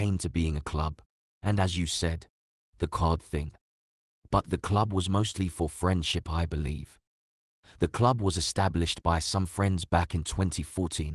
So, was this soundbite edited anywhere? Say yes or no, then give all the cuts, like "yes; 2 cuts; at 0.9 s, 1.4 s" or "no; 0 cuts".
no; 0 cuts